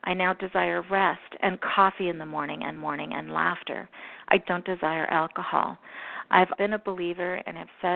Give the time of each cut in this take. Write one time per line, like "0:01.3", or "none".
0:02.8
0:04.4
0:06.5